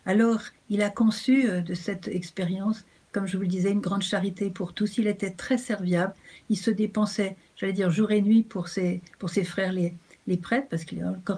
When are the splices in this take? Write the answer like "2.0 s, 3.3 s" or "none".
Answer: none

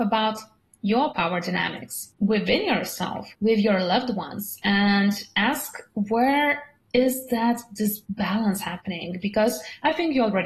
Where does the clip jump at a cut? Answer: 2.2 s, 3.3 s

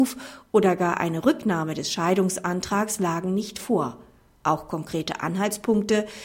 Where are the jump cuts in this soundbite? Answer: none

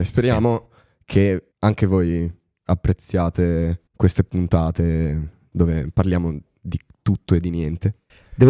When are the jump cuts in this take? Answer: 1.5 s, 3.9 s

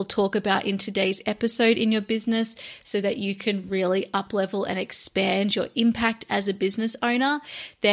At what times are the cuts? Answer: none

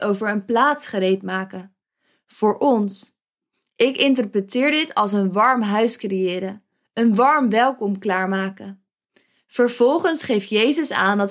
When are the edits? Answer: none

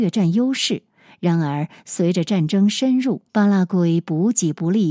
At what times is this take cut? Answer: 3.3 s

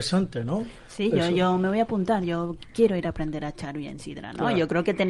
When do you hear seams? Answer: none

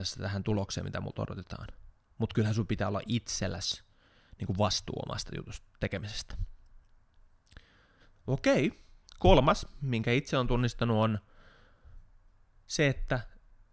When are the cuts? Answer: none

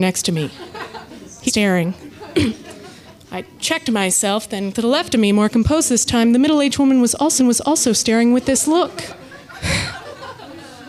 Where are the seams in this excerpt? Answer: 1.5 s, 4.7 s, 7.4 s

